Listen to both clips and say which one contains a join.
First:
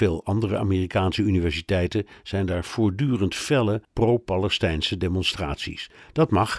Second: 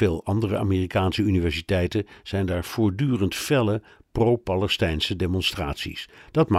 first; 1 cut; at 3.8 s

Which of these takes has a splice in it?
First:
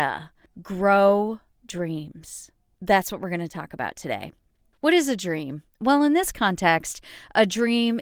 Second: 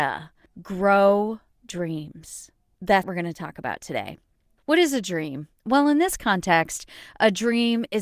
second; 1 cut; at 3.0 s

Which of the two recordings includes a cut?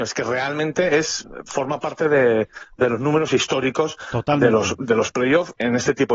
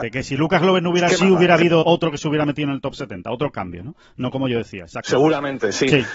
second; 2 cuts; at 1.1 s, 1.8 s

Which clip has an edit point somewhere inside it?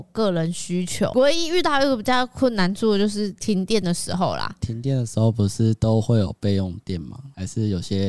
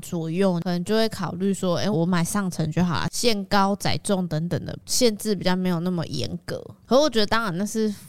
second; 1 cut; at 1.9 s

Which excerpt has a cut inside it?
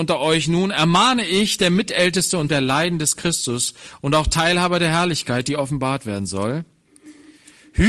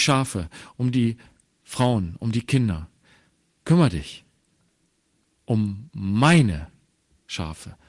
first; 1 cut; at 2.5 s

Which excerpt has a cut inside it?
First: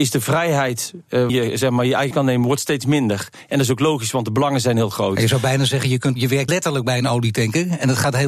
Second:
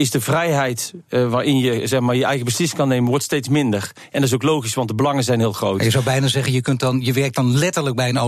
first; 4 cuts; at 1.3 s, 2.1 s, 6.2 s, 6.5 s

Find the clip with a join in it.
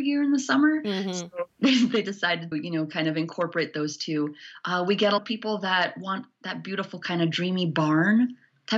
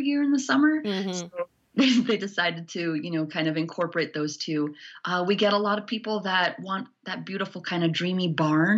first; 3 cuts; at 1.5 s, 2.5 s, 5.2 s

